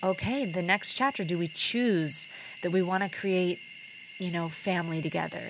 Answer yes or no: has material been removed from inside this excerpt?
no